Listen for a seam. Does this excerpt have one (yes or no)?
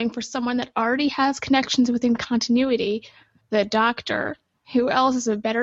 no